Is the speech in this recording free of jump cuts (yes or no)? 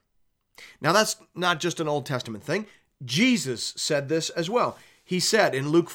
yes